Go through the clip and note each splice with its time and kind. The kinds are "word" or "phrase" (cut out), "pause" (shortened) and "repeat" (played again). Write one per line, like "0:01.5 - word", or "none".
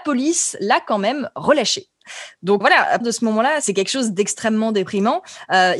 0:02.6 - word
0:03.0 - word